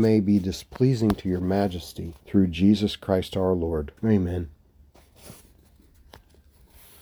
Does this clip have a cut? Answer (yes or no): yes